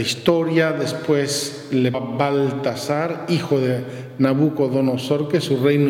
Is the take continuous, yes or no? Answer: no